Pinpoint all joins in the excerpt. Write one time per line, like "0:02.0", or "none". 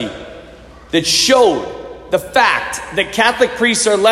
none